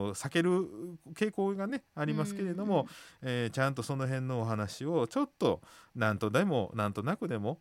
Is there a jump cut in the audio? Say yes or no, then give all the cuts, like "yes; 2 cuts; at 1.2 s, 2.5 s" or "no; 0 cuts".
no; 0 cuts